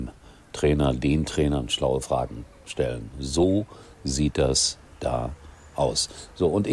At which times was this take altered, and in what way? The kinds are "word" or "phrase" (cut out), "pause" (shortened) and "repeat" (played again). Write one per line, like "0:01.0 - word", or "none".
none